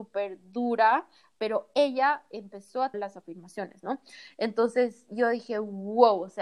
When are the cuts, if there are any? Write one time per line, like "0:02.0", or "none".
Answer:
0:02.9